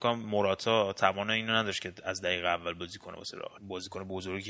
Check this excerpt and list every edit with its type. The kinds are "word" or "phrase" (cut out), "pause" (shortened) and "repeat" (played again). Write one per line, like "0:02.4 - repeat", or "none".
none